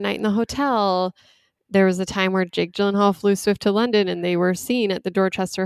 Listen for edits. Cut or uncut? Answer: uncut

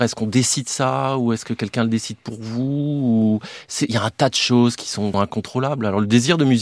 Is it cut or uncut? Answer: cut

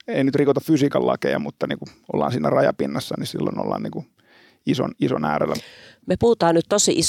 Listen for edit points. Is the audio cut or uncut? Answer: uncut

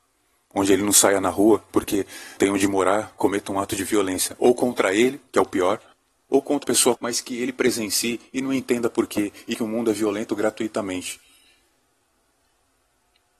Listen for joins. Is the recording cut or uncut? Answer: cut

